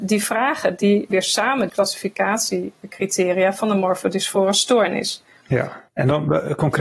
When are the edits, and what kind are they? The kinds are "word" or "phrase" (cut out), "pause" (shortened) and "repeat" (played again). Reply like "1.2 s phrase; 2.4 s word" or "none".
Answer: 1.1 s word; 1.7 s phrase; 5.9 s pause